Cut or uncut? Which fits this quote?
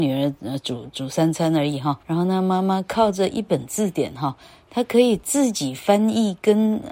cut